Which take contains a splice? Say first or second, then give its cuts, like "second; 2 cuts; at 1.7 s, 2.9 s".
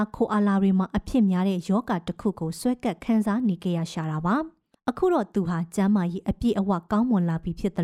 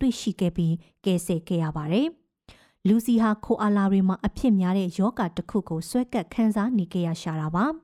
first; 1 cut; at 4.7 s